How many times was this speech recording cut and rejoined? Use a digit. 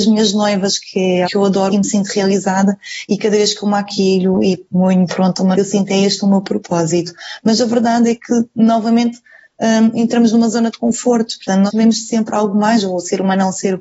4